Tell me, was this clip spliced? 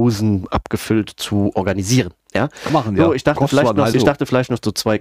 yes; 2 cuts; at 2.7 s, 3.9 s

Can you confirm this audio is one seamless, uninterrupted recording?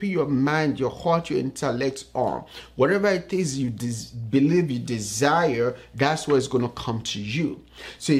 yes; 0 cuts

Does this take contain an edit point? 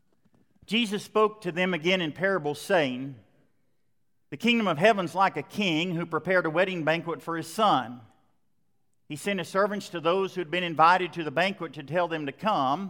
no; 0 cuts

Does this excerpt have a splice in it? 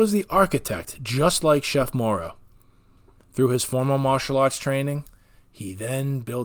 no; 0 cuts

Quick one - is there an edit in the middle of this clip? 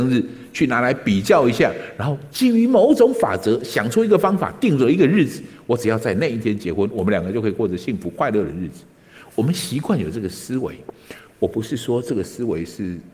no; 0 cuts

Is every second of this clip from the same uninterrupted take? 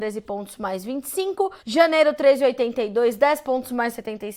no; 1 cut; at 1.6 s

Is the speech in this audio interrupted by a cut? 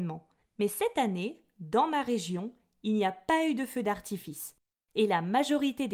no; 0 cuts

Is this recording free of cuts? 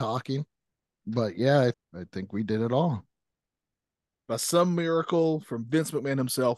no; 1 cut; at 1.7 s

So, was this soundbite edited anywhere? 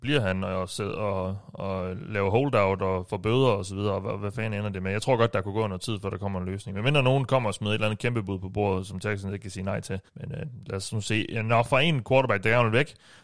yes; 1 cut; at 10.1 s

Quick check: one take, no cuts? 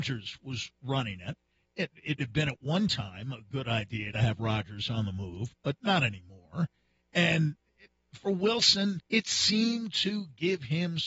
no; 2 cuts; at 2.2 s, 9.1 s

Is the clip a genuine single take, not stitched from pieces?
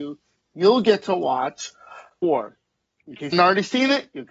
no; 2 cuts; at 2.2 s, 3.3 s

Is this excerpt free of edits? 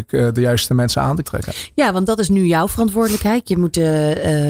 no; 1 cut; at 1.2 s

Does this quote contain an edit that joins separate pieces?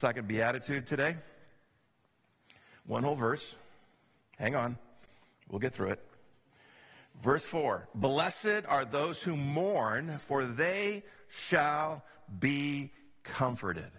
no; 0 cuts

